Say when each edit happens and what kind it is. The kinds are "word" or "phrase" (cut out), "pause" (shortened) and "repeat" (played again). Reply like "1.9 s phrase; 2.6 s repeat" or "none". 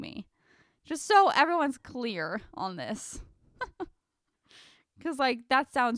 none